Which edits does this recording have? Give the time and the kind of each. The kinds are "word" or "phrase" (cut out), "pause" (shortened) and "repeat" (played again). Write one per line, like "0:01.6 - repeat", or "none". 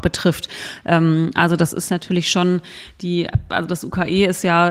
none